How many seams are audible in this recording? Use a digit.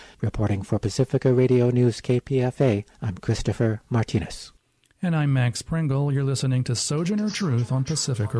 1